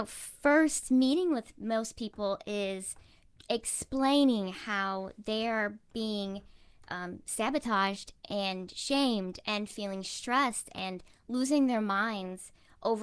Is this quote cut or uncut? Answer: uncut